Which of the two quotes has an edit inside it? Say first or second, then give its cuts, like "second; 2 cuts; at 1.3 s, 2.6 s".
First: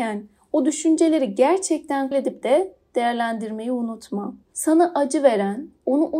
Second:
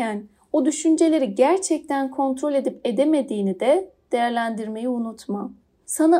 first; 3 cuts; at 2.1 s, 2.4 s, 4.4 s